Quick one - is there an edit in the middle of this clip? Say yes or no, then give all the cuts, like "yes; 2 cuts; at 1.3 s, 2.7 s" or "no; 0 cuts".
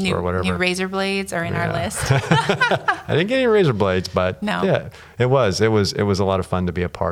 no; 0 cuts